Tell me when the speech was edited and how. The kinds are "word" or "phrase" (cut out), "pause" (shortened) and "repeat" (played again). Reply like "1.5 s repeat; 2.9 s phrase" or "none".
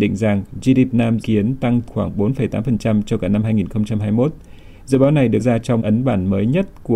0.9 s word; 1.2 s word; 1.9 s word; 5.4 s word; 5.8 s word